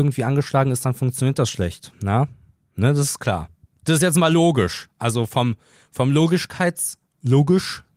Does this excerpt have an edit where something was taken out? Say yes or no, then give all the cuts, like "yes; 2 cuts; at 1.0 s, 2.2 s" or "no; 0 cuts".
no; 0 cuts